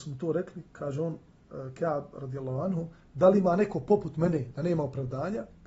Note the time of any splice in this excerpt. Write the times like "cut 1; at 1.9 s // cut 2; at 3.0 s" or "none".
none